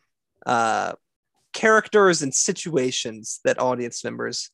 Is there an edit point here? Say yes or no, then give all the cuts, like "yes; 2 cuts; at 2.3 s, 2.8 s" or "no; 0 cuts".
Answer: no; 0 cuts